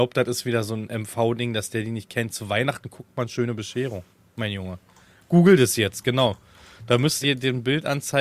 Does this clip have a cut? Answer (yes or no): yes